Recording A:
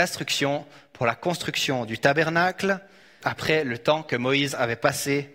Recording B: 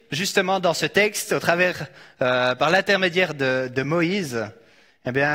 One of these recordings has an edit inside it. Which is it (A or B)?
A